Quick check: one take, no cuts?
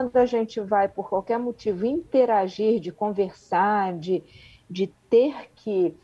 yes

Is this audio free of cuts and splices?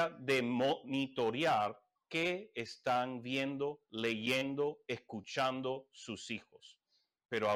no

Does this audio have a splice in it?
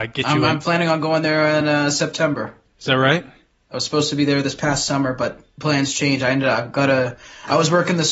no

